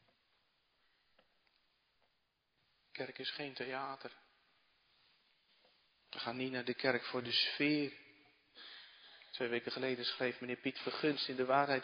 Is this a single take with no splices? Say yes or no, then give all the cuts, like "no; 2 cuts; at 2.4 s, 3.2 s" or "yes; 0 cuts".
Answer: yes; 0 cuts